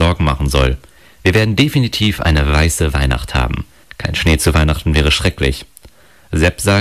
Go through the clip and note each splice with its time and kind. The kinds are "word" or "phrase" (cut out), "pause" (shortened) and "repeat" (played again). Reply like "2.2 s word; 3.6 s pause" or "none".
3.8 s pause